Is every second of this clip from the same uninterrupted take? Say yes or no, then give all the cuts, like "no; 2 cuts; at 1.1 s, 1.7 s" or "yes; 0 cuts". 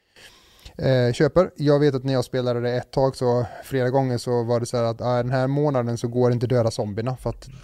yes; 0 cuts